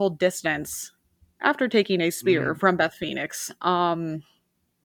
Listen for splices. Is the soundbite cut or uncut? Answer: uncut